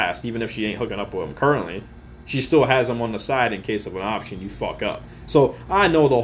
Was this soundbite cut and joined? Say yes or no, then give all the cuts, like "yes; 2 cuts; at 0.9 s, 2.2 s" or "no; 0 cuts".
no; 0 cuts